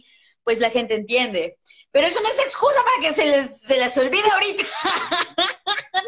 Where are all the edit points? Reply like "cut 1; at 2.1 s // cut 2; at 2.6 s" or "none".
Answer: none